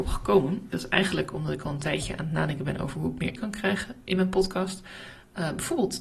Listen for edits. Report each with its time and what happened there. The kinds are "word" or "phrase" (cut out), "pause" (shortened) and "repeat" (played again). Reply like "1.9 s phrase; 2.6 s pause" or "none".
3.4 s word